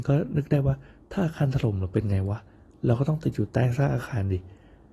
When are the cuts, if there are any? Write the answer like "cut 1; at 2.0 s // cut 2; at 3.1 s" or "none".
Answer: none